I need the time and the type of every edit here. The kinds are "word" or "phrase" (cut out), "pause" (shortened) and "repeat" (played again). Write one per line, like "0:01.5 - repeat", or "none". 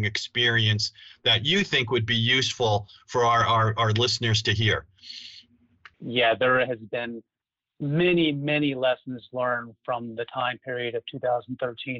0:05.9 - pause